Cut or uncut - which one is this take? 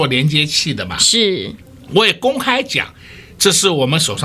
uncut